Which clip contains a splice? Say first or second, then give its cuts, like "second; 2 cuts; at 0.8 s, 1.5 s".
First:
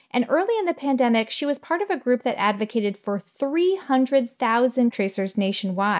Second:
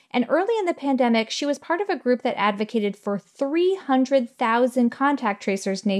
first; 1 cut; at 4.9 s